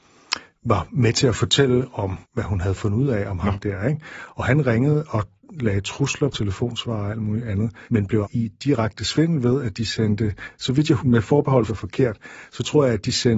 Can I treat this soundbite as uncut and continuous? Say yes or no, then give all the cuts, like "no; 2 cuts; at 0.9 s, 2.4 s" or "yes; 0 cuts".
no; 6 cuts; at 2.2 s, 6.3 s, 7.9 s, 8.2 s, 11.0 s, 11.7 s